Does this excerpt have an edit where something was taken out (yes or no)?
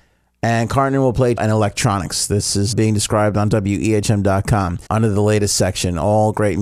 yes